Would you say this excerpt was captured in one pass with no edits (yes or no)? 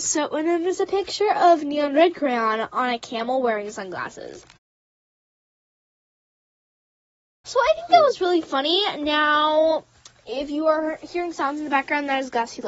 yes